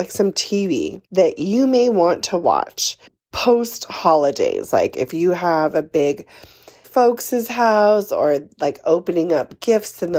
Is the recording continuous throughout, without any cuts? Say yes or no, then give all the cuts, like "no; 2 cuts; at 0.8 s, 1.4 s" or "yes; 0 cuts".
no; 3 cuts; at 1.1 s, 3.1 s, 6.8 s